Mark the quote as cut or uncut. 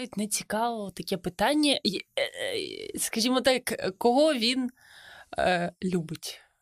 uncut